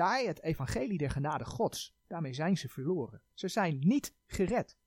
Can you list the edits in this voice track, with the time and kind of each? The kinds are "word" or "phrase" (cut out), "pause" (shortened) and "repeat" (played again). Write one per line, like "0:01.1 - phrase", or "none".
none